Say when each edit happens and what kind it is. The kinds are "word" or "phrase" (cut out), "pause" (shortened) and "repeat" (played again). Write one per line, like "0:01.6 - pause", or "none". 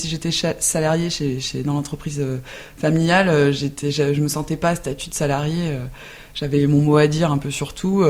none